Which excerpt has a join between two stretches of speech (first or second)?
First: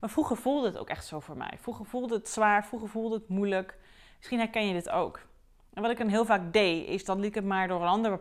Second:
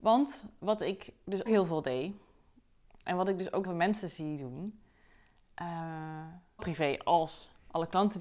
second